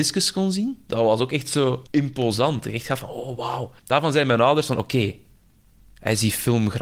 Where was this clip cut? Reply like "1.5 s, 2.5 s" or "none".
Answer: 1.9 s, 3.8 s